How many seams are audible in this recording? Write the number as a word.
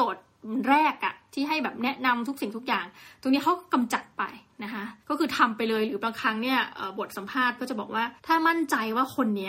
three